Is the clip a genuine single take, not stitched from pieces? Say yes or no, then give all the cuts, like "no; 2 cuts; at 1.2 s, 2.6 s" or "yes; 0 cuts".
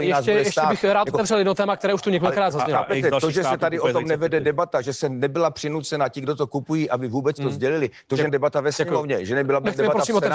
no; 1 cut; at 8.3 s